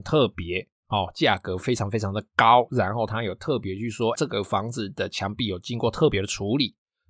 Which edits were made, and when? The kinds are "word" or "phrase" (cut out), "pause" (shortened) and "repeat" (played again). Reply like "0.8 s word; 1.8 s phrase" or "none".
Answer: 4.2 s word